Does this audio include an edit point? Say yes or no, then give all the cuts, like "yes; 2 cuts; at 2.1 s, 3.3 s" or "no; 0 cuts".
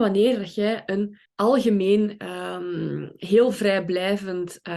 yes; 1 cut; at 1.2 s